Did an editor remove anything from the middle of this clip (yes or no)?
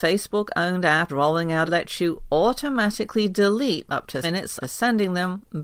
yes